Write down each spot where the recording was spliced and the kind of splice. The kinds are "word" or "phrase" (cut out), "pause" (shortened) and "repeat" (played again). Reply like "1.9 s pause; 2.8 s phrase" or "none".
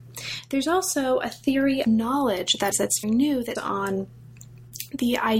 1.8 s word; 2.7 s word; 3.0 s word; 3.6 s word